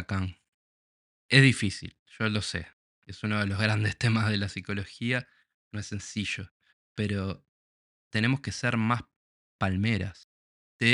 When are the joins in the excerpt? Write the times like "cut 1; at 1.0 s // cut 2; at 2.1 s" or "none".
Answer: cut 1; at 2.0 s